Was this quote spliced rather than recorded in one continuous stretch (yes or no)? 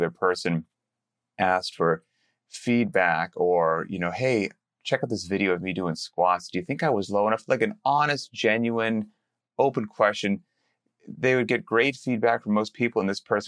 no